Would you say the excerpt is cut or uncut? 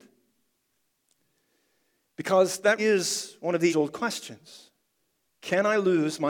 cut